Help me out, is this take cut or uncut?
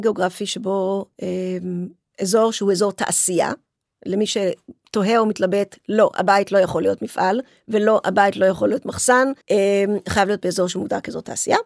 cut